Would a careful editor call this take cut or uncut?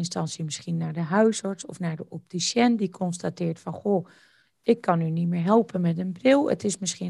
uncut